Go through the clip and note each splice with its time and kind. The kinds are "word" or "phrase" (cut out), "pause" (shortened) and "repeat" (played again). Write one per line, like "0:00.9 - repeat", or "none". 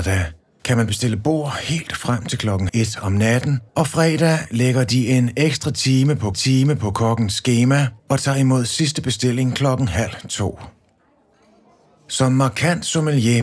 0:02.7 - word
0:03.7 - pause
0:06.3 - repeat
0:08.0 - pause